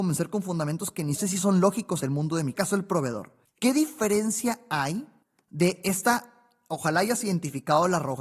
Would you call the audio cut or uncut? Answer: cut